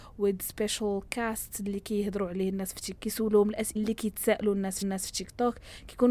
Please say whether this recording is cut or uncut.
cut